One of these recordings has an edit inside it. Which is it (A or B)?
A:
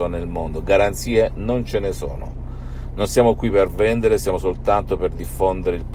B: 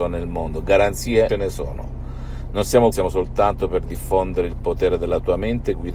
B